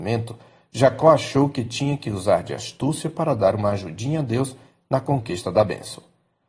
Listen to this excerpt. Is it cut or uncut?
uncut